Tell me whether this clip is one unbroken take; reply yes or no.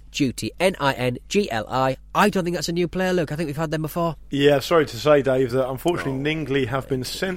yes